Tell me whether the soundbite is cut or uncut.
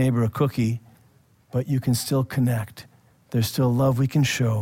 uncut